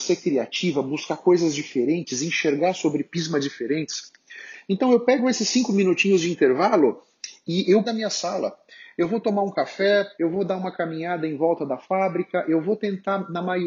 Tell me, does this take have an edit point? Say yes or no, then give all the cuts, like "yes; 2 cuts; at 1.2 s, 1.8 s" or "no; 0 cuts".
yes; 2 cuts; at 7.8 s, 10.1 s